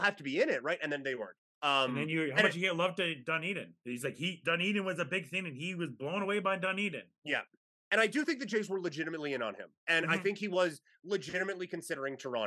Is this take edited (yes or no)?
no